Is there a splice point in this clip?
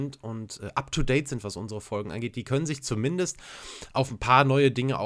no; 0 cuts

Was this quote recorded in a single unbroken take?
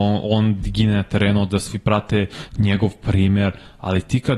yes; 0 cuts

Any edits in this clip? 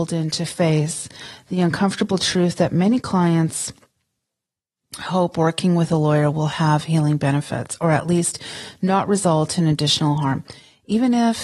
no; 0 cuts

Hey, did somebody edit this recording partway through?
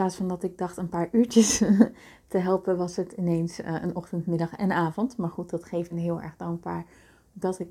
yes; 1 cut; at 5.9 s

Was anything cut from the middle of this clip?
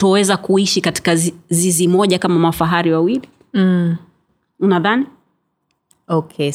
no; 0 cuts

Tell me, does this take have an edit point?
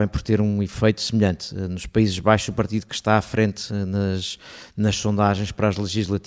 no; 0 cuts

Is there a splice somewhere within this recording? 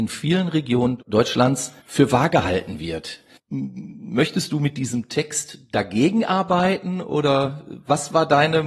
yes; 1 cut; at 1.8 s

